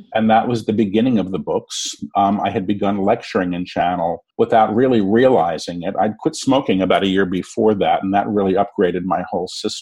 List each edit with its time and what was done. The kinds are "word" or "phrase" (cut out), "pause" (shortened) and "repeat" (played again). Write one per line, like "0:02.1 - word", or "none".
0:04.3 - pause